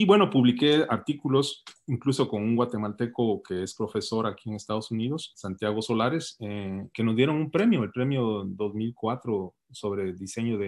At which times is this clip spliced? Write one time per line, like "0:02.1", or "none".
0:05.3
0:06.9